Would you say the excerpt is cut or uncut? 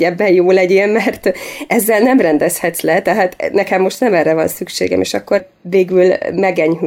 uncut